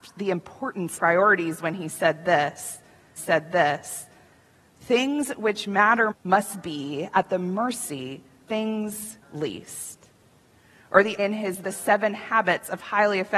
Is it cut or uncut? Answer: cut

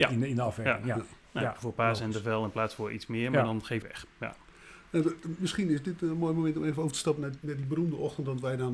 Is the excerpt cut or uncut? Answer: cut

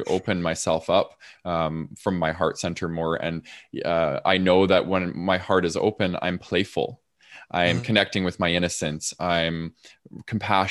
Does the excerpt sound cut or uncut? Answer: uncut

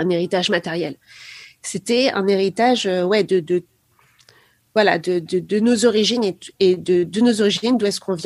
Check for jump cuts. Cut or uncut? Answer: uncut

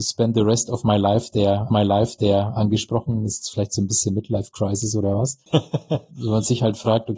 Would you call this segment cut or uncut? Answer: cut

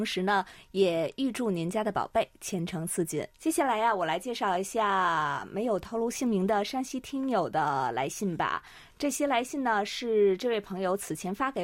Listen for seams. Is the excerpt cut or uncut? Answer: cut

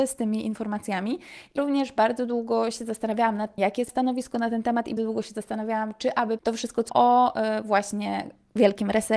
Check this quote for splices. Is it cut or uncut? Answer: cut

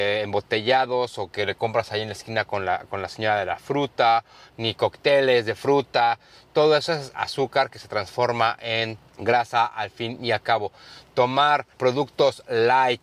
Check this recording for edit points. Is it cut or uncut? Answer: uncut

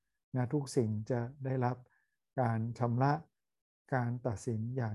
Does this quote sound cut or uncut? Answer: uncut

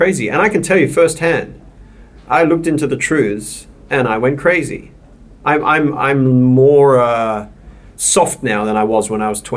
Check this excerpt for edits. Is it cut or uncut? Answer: cut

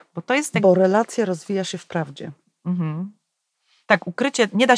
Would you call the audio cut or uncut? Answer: uncut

